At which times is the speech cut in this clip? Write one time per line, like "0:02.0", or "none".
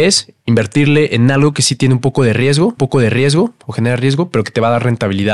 0:02.8